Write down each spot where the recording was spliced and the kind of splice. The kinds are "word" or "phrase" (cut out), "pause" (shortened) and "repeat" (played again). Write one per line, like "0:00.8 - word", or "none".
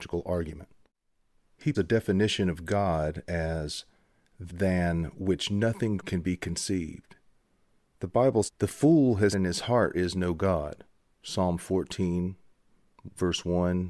0:01.7 - word
0:04.5 - word
0:06.0 - word
0:08.5 - word
0:09.3 - word
0:09.9 - word